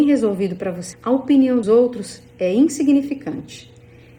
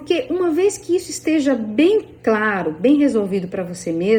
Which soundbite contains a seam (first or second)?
first